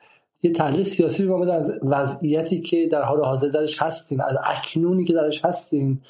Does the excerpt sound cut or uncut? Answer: uncut